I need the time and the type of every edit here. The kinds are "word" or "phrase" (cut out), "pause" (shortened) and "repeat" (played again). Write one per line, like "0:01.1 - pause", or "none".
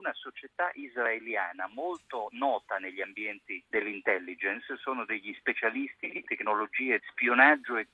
0:03.6 - pause
0:07.0 - word